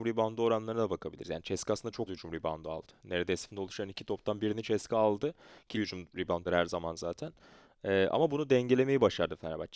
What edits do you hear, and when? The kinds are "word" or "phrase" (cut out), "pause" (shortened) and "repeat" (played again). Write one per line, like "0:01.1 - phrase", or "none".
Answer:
0:02.1 - word
0:03.5 - phrase
0:05.7 - word
0:06.4 - word